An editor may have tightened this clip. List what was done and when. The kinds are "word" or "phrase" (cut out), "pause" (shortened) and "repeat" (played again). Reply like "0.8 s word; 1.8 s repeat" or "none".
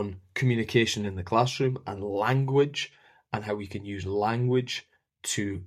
none